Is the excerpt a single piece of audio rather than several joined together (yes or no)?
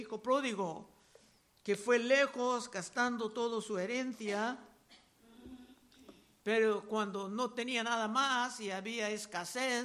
yes